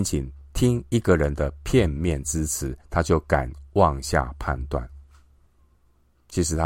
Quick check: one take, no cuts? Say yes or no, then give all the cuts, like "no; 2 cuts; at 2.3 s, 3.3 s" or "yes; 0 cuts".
no; 1 cut; at 2.8 s